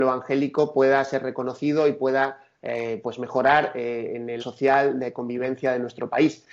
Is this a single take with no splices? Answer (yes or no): no